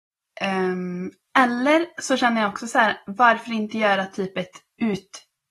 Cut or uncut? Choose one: uncut